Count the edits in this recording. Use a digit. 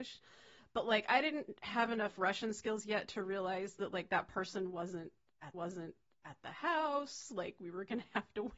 1